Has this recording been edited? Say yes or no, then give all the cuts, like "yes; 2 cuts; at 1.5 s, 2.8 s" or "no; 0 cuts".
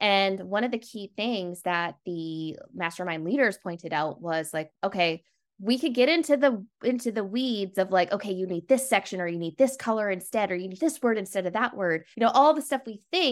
yes; 3 cuts; at 4.7 s, 10.8 s, 12.1 s